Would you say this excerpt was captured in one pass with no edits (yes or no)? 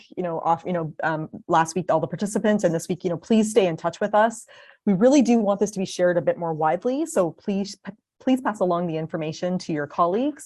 yes